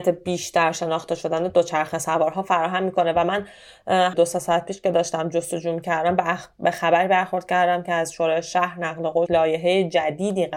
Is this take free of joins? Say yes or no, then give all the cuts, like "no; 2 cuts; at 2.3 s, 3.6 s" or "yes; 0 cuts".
no; 2 cuts; at 4.1 s, 9.3 s